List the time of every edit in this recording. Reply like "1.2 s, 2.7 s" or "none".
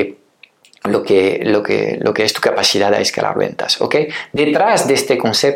none